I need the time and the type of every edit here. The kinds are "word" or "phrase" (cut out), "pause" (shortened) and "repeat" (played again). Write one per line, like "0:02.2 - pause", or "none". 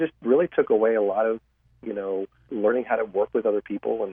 0:02.5 - word